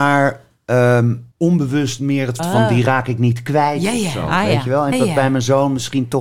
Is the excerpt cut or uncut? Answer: cut